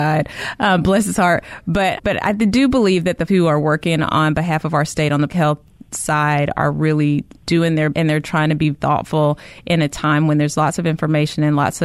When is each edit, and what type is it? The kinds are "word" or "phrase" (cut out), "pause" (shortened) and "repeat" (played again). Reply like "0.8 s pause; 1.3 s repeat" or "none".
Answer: 2.0 s word; 3.3 s word; 5.3 s word; 7.4 s word; 7.9 s word; 8.7 s word

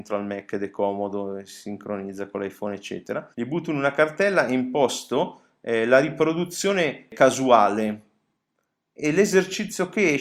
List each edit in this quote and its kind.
3.3 s pause

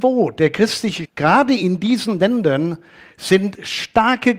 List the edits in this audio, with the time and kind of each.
1.0 s phrase

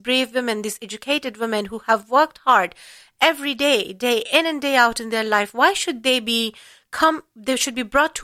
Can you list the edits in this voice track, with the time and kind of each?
none

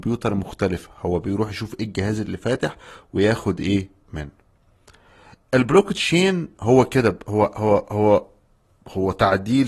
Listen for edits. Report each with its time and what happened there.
none

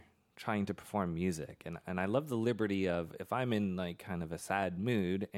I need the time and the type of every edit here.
none

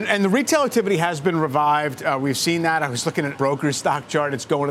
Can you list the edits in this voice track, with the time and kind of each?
3.4 s word

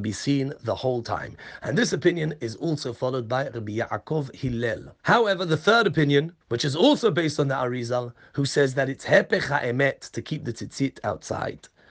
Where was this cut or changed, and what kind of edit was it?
5.0 s pause; 6.4 s pause

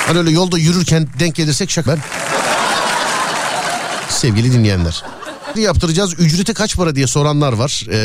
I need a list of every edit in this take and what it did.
1.9 s word; 5.5 s phrase

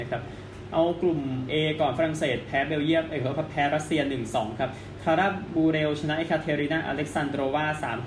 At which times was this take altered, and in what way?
none

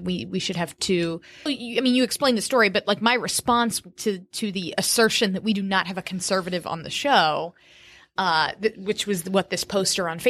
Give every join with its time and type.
1.5 s word; 3.9 s pause

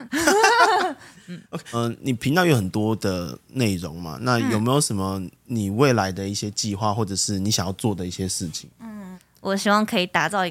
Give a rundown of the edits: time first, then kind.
5.4 s pause; 8.7 s pause

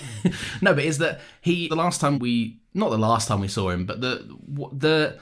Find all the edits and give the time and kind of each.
1.7 s word; 2.1 s word; 2.7 s pause

